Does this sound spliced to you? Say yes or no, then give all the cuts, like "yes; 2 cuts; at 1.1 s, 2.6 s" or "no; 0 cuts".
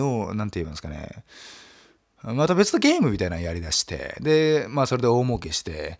no; 0 cuts